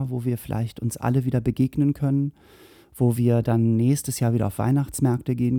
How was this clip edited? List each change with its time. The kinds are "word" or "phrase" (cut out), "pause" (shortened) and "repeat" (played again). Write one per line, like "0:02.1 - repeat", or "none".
none